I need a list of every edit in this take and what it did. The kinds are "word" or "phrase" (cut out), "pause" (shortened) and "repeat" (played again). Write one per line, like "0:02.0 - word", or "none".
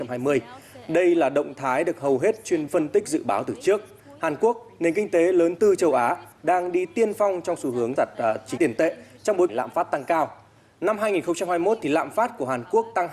0:02.7 - word
0:05.6 - word
0:08.0 - word
0:08.6 - word
0:09.5 - word